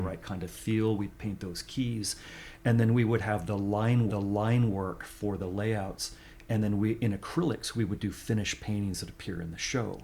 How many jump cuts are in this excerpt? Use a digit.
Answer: 1